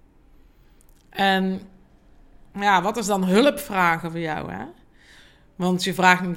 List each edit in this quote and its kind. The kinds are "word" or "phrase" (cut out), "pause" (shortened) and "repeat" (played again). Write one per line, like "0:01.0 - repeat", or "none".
none

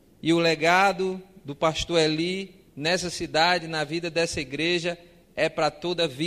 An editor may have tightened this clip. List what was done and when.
0:02.7 - pause

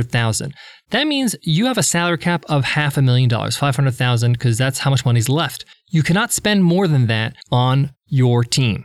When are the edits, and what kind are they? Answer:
0:05.7 - pause
0:07.4 - pause

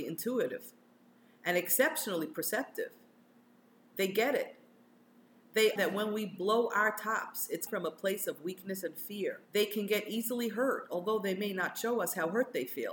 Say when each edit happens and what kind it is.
0:05.8 - word
0:07.7 - word
0:09.4 - pause

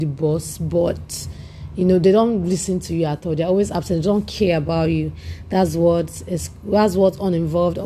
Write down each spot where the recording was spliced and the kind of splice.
none

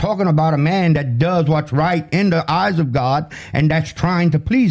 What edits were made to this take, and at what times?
none

